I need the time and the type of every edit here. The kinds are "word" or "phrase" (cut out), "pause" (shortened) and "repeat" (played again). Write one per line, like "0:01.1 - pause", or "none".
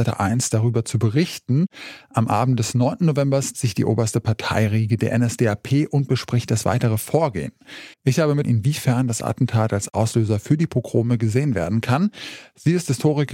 0:03.5 - word
0:07.9 - pause
0:08.4 - phrase